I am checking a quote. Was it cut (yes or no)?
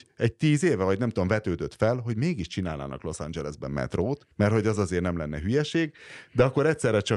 yes